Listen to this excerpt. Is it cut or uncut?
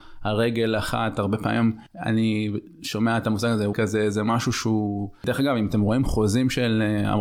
cut